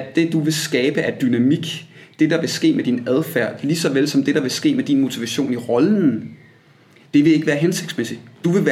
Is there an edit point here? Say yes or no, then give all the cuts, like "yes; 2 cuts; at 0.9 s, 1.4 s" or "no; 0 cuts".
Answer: no; 0 cuts